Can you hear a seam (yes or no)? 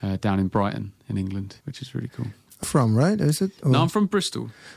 yes